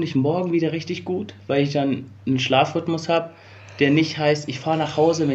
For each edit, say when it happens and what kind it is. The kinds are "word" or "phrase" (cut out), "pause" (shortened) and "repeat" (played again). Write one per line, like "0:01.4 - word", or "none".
none